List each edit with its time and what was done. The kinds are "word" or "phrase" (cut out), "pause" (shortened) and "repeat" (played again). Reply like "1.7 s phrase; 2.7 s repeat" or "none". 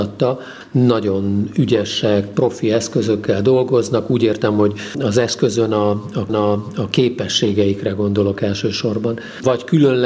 6.3 s repeat